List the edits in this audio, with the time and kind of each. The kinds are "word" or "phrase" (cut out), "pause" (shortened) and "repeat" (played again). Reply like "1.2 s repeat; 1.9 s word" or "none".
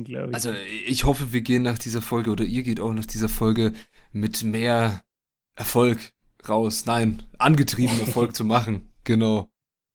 none